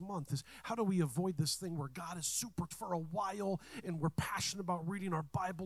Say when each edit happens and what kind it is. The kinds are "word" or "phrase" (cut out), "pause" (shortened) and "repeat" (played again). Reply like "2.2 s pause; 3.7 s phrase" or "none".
2.7 s word